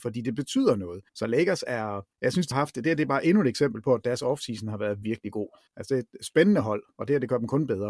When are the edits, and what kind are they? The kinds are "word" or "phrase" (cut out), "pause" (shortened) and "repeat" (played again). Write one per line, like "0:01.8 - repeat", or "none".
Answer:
0:01.1 - pause
0:02.1 - pause
0:02.5 - word
0:05.0 - word
0:05.7 - pause